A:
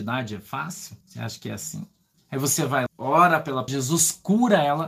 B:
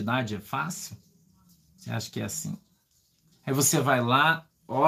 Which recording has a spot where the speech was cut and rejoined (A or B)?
A